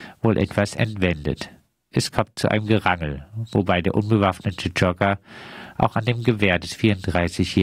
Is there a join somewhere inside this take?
no; 0 cuts

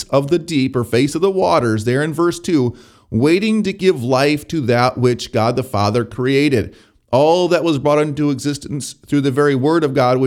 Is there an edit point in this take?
no; 0 cuts

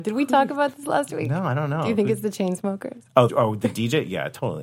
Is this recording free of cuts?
no; 1 cut; at 3.3 s

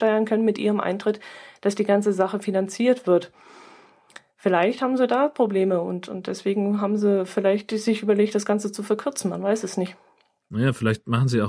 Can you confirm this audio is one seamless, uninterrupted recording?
yes; 0 cuts

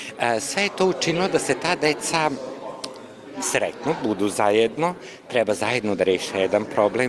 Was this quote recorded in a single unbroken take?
yes; 0 cuts

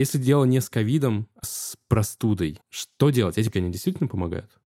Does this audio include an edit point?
yes; 3 cuts; at 1.4 s, 2.6 s, 3.5 s

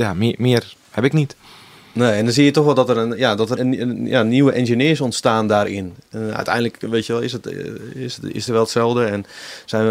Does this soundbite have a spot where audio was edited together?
yes; 2 cuts; at 3.6 s, 8.5 s

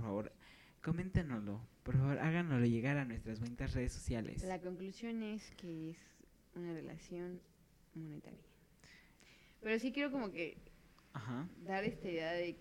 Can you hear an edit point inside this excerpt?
no; 0 cuts

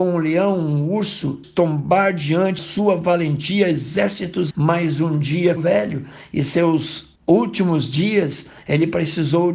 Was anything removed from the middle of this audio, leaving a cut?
yes; 5 cuts; at 1.4 s, 2.6 s, 4.5 s, 5.6 s, 7.2 s

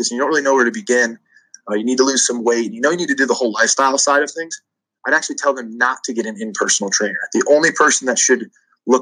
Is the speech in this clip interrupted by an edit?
no; 0 cuts

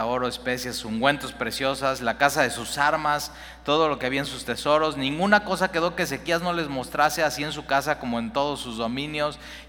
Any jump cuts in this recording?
no; 0 cuts

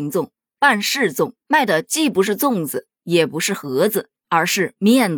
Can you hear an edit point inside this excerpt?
yes; 1 cut; at 1.4 s

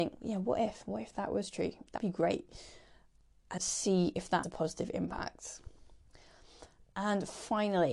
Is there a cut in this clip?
yes; 3 cuts; at 2.0 s, 3.6 s, 4.4 s

